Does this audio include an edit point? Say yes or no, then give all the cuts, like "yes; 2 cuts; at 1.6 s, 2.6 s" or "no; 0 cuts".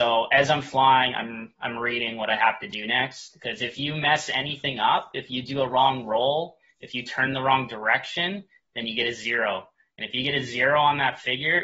no; 0 cuts